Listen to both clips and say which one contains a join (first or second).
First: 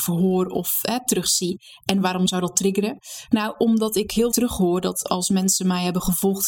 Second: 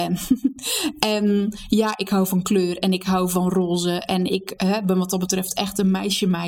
first